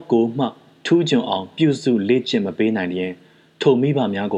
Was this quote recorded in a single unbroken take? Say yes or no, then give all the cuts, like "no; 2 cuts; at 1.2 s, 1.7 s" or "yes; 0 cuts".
yes; 0 cuts